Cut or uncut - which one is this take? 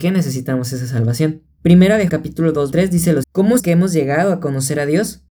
cut